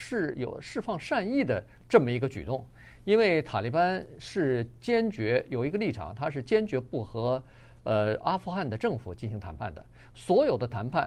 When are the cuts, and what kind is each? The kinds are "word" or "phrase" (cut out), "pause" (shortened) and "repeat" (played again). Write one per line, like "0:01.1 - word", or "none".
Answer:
none